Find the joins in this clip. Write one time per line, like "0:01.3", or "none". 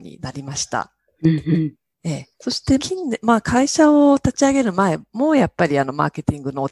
0:02.3
0:02.8